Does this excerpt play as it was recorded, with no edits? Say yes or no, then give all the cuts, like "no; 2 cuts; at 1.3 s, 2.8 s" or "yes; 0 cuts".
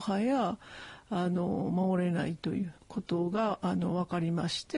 no; 1 cut; at 2.8 s